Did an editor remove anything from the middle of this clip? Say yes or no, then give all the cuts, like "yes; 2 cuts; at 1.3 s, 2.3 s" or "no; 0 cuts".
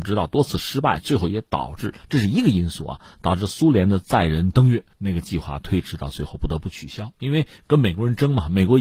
yes; 1 cut; at 4.9 s